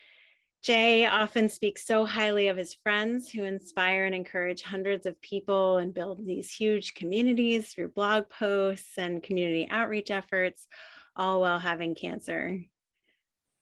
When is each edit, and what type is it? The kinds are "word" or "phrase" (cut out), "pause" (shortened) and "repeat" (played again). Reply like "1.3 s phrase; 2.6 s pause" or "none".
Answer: none